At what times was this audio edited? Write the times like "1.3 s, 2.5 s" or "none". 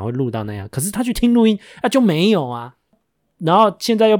none